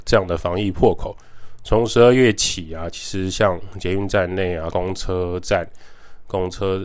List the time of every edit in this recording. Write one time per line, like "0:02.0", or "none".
0:04.7